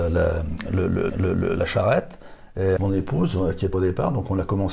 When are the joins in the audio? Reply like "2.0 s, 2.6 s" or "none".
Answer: 1.1 s, 2.8 s, 3.7 s